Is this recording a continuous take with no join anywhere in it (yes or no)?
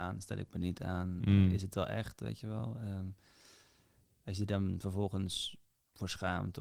yes